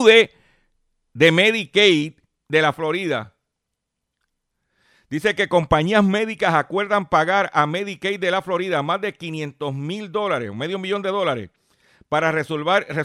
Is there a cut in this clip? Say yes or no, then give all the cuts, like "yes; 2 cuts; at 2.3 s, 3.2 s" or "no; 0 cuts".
no; 0 cuts